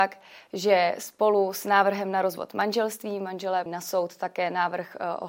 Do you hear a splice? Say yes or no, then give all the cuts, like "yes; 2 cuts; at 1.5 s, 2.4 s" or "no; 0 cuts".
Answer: yes; 1 cut; at 3.7 s